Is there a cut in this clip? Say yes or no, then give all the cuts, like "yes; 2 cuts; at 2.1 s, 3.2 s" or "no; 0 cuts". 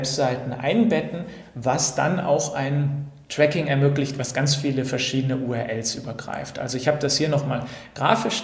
no; 0 cuts